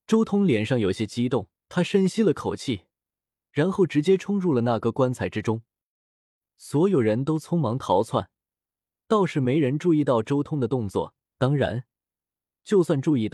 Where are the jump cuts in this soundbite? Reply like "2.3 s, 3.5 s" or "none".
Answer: 1.5 s